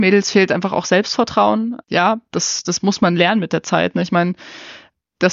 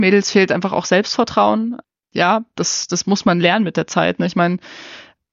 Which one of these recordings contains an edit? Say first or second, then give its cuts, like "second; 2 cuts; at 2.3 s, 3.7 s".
first; 1 cut; at 1.8 s